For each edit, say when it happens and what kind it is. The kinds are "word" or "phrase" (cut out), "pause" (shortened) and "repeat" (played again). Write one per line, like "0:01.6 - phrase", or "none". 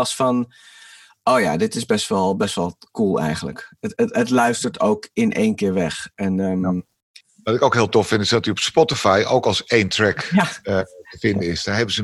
none